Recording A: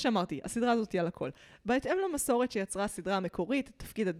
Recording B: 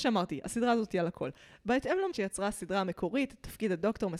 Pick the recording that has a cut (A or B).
B